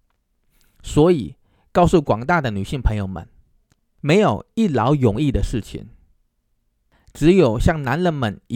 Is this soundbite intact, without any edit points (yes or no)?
yes